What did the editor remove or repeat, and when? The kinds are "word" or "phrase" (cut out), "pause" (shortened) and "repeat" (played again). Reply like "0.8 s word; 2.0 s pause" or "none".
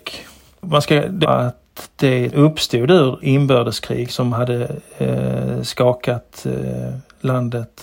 1.2 s phrase; 2.3 s word; 3.2 s word; 4.1 s word